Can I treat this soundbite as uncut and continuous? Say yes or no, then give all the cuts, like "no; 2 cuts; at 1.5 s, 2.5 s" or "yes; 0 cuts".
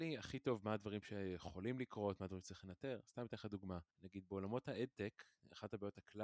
no; 1 cut; at 3.9 s